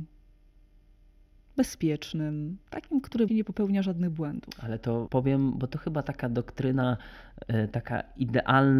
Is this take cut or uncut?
cut